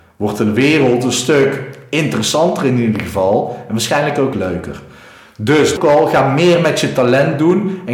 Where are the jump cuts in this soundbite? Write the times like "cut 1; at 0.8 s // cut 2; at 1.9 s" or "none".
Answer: cut 1; at 4.3 s // cut 2; at 5.8 s